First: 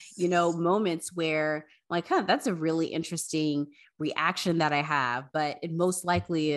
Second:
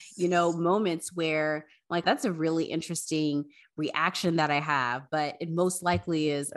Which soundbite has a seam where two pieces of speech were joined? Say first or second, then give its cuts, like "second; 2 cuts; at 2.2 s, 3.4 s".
second; 1 cut; at 2.0 s